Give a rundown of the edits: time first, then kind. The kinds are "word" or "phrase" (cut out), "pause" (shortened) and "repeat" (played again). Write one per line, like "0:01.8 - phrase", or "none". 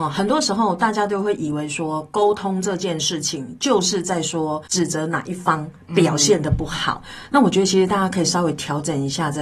0:04.7 - pause